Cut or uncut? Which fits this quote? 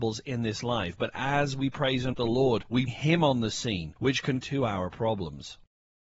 cut